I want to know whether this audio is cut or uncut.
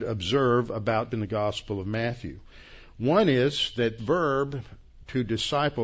cut